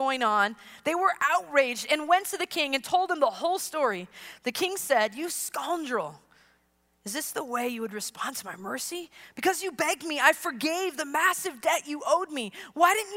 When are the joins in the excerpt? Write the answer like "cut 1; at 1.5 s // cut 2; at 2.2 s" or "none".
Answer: none